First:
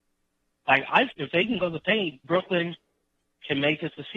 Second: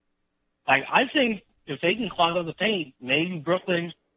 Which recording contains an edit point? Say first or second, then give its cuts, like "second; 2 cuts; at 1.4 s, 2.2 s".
first; 3 cuts; at 1.1 s, 1.6 s, 2.2 s